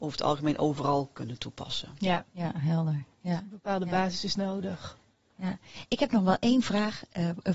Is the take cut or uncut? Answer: uncut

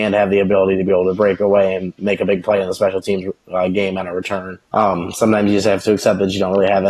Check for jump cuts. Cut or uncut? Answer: cut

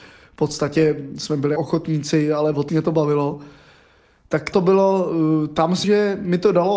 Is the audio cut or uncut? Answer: cut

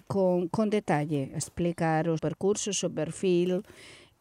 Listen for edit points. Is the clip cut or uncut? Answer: cut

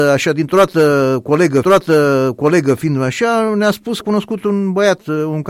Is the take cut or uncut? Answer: cut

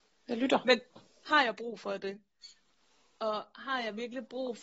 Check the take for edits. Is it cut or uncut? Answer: uncut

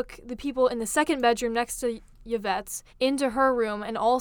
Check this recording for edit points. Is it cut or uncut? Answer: cut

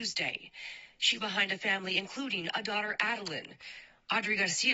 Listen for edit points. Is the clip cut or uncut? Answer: cut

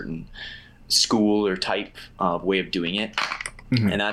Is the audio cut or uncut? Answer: uncut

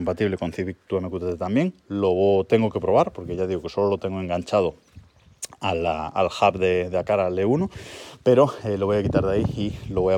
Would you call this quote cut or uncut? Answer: uncut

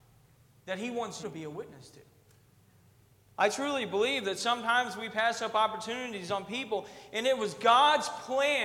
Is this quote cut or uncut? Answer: cut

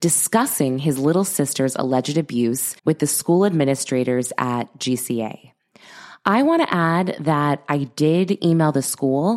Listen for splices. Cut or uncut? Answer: cut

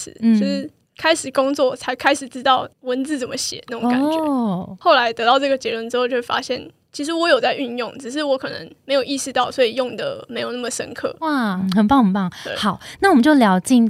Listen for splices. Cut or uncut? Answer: cut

